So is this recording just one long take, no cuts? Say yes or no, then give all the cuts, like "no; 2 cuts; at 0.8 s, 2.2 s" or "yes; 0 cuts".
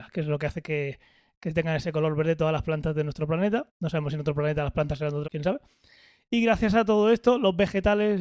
no; 1 cut; at 5.2 s